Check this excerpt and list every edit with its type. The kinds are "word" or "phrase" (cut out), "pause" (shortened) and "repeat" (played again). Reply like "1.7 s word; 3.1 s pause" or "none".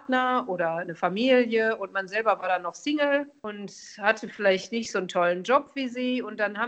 none